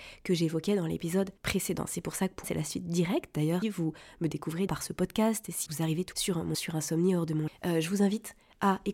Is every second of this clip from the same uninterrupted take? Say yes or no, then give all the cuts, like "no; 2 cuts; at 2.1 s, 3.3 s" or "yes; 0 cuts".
no; 8 cuts; at 1.4 s, 2.4 s, 3.6 s, 4.7 s, 5.7 s, 6.1 s, 6.5 s, 7.5 s